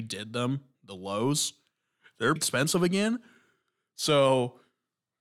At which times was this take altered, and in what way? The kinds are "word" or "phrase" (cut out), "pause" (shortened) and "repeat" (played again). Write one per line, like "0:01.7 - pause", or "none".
0:02.4 - word